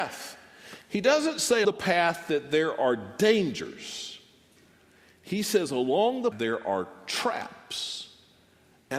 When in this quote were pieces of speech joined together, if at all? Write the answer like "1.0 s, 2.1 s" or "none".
1.6 s, 6.3 s